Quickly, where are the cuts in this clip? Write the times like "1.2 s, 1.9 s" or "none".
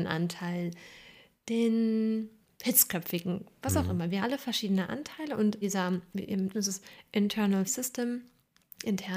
4.2 s, 5.6 s, 6.5 s, 7.7 s